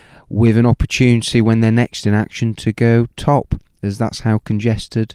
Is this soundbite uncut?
yes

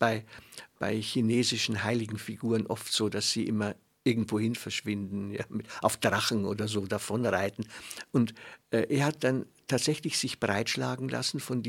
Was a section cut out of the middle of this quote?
no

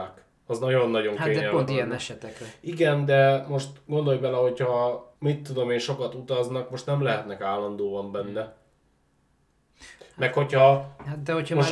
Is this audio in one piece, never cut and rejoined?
no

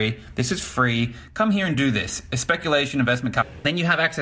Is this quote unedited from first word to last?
yes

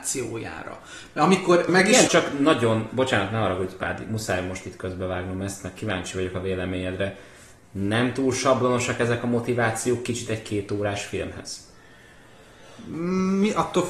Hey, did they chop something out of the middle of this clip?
yes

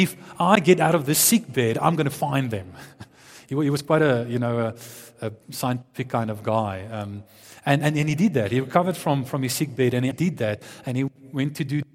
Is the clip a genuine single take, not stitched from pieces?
no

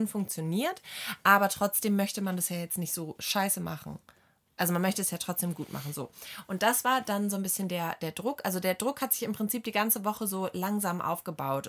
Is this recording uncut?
yes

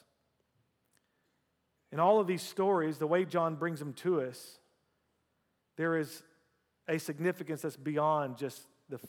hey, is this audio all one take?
yes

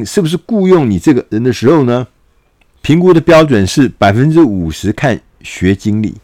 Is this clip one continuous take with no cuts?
yes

